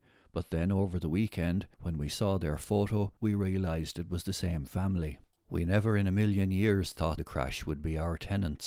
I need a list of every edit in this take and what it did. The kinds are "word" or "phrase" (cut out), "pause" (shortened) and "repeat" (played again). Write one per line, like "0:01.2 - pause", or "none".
0:01.7 - pause
0:03.2 - pause
0:05.4 - pause
0:07.2 - phrase